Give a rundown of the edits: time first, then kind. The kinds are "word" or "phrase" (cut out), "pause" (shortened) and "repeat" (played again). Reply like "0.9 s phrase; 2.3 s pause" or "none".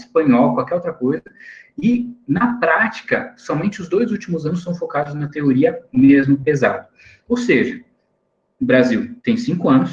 none